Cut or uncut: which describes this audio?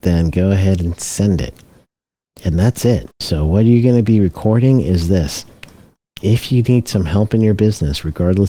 cut